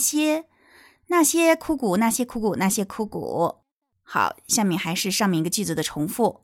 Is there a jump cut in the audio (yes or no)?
no